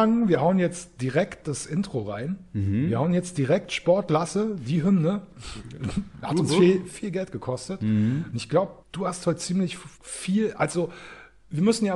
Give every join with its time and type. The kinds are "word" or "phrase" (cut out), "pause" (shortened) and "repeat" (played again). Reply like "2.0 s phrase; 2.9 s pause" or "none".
6.9 s word; 8.8 s pause; 9.9 s pause